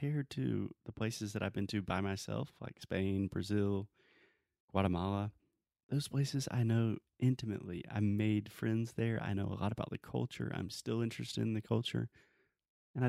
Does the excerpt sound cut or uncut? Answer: uncut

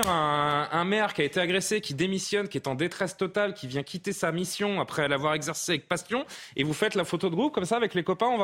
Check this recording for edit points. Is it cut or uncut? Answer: uncut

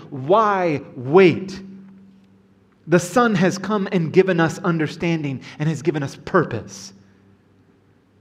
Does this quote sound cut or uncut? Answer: uncut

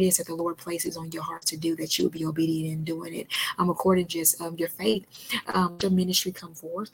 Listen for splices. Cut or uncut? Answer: cut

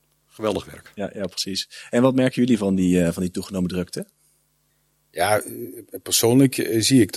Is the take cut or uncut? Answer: uncut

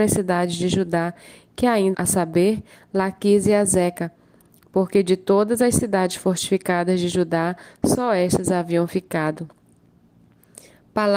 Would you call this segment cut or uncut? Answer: cut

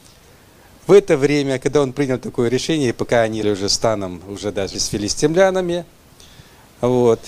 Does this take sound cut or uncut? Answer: cut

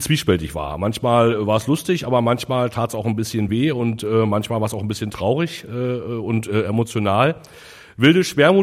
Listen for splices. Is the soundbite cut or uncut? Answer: uncut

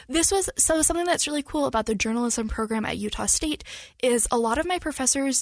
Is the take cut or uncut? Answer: uncut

